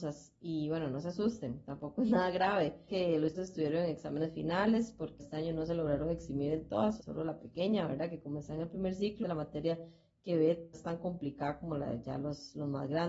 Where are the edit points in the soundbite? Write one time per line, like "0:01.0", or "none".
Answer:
0:02.9
0:03.3
0:05.2
0:07.0
0:09.2
0:10.7